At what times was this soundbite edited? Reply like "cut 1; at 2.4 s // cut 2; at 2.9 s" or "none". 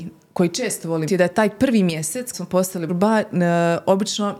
cut 1; at 1.1 s // cut 2; at 2.3 s // cut 3; at 2.9 s